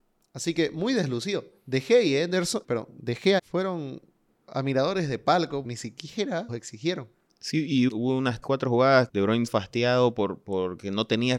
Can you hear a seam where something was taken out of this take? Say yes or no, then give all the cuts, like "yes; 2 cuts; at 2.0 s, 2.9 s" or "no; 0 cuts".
yes; 9 cuts; at 2.6 s, 3.4 s, 4.3 s, 5.6 s, 6.5 s, 7.9 s, 8.4 s, 9.1 s, 9.5 s